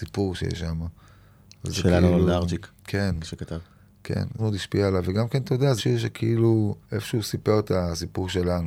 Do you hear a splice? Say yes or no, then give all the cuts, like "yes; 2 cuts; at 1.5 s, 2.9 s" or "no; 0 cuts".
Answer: yes; 3 cuts; at 4.4 s, 5.8 s, 6.8 s